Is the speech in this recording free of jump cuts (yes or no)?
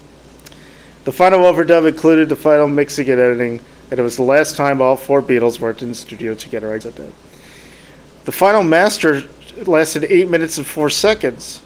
no